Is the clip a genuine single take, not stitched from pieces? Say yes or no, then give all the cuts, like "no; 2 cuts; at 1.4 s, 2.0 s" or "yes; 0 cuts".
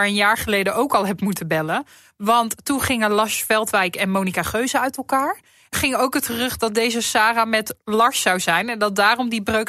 no; 1 cut; at 5.7 s